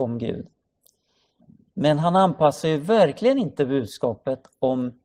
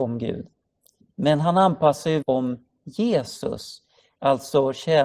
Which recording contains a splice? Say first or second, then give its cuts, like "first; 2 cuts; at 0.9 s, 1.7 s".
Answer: second; 2 cuts; at 1.0 s, 2.2 s